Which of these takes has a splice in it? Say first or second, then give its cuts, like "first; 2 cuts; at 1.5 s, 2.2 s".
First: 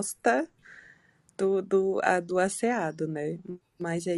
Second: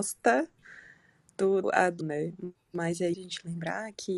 second; 3 cuts; at 1.6 s, 2.0 s, 3.1 s